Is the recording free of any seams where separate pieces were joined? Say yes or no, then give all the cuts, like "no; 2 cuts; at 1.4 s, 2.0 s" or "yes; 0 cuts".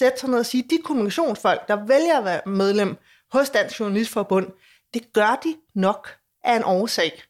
yes; 0 cuts